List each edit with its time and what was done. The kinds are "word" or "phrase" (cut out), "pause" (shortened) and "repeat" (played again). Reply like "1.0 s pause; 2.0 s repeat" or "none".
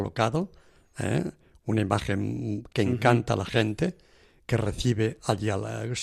2.7 s word